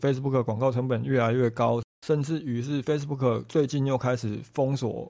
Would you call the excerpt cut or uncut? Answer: uncut